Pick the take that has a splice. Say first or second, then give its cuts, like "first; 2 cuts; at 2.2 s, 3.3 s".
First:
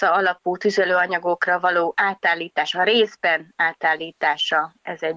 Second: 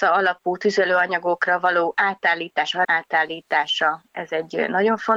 second; 1 cut; at 2.8 s